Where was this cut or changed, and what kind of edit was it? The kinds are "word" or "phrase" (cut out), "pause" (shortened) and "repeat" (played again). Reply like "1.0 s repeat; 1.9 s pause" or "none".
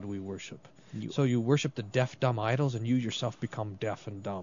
none

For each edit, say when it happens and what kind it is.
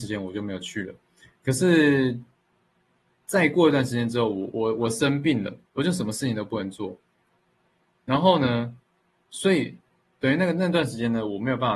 5.7 s pause

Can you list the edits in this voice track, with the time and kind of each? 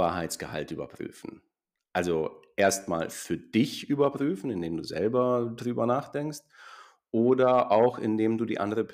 none

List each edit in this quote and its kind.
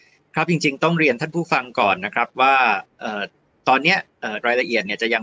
2.9 s pause

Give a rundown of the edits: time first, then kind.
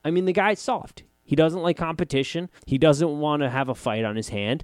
2.6 s pause

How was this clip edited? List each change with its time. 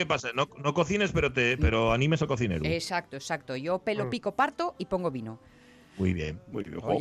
none

